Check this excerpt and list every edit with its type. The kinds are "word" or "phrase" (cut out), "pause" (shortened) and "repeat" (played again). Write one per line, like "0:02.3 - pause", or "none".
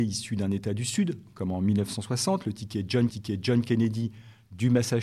0:03.1 - repeat